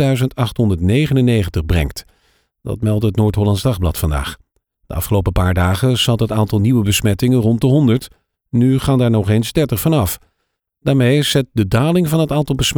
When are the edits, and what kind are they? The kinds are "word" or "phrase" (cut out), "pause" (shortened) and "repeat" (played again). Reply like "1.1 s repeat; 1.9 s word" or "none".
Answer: none